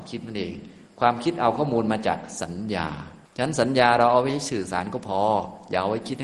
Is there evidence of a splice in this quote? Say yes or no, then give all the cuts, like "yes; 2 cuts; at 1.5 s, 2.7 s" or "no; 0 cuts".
yes; 1 cut; at 3.2 s